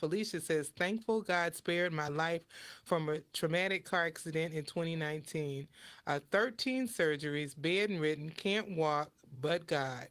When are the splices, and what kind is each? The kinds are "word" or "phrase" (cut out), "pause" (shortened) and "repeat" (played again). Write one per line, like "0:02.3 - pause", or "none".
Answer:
none